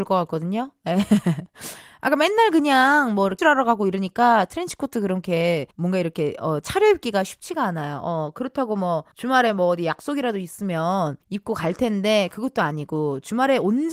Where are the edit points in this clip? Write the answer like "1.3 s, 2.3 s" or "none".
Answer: 3.4 s, 5.7 s, 9.1 s, 11.2 s